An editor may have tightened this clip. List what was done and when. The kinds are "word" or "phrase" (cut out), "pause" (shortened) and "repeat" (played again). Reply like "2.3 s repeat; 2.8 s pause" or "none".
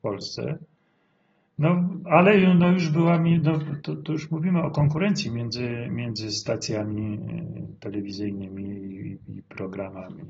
none